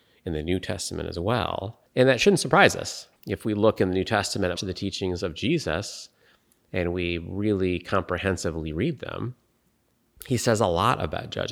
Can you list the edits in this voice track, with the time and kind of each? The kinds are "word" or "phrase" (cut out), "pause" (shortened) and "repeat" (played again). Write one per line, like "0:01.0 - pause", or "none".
0:01.9 - pause
0:03.2 - pause
0:04.6 - word